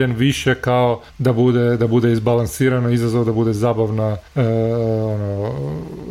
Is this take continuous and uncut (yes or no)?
no